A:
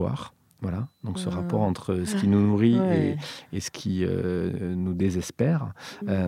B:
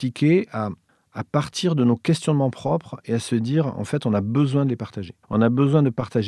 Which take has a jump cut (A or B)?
B